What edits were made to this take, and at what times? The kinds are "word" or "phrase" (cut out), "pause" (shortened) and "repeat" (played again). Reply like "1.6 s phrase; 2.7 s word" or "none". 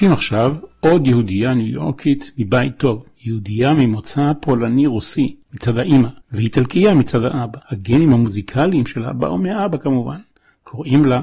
5.4 s pause; 6.2 s pause; 7.6 s pause